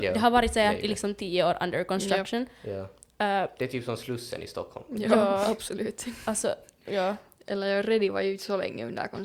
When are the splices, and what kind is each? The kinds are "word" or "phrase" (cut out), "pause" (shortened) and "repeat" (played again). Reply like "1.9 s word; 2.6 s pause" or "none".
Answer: none